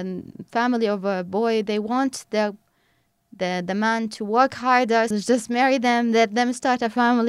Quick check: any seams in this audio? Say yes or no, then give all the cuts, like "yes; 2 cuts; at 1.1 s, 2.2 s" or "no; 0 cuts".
yes; 1 cut; at 5.1 s